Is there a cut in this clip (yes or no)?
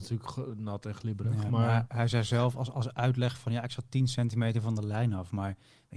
no